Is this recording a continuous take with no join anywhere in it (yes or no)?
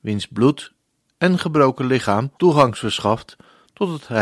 no